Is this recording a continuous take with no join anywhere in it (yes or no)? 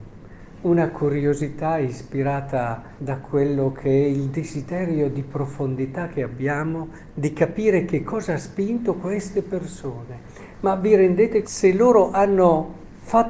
no